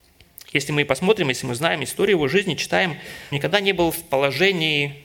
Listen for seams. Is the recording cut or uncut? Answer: cut